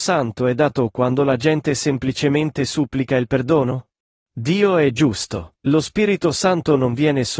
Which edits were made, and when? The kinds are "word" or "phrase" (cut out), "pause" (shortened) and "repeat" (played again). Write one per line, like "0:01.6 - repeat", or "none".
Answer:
0:04.0 - pause
0:05.6 - pause